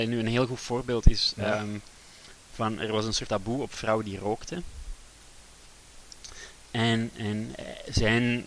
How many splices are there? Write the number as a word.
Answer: one